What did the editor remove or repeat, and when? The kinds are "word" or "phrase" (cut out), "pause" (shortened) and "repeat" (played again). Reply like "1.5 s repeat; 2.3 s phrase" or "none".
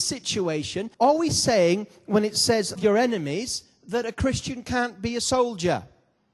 0.9 s pause; 2.8 s word